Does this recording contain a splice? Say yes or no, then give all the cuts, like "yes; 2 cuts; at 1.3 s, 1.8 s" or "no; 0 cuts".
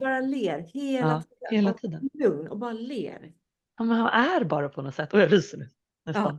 no; 0 cuts